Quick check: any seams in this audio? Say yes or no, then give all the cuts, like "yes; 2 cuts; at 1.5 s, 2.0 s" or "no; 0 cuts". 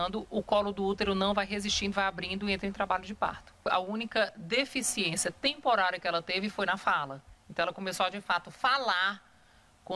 yes; 1 cut; at 1.9 s